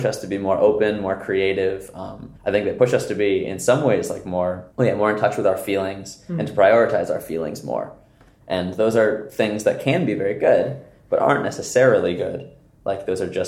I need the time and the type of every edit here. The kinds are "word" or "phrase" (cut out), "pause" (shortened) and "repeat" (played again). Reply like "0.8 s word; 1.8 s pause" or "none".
2.4 s pause; 4.7 s pause